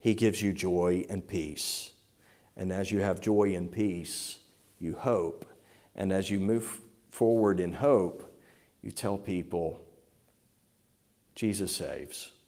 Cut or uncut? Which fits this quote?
uncut